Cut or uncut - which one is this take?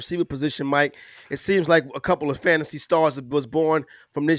uncut